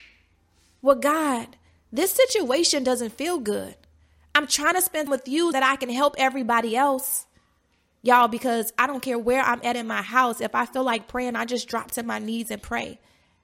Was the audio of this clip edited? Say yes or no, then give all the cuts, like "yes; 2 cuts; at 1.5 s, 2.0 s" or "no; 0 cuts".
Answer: yes; 2 cuts; at 5.1 s, 5.5 s